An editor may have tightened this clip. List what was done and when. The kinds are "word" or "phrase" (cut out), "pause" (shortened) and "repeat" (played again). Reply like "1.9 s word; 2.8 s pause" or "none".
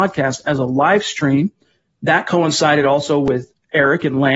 none